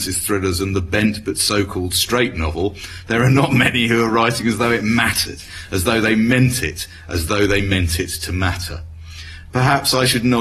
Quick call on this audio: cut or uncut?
uncut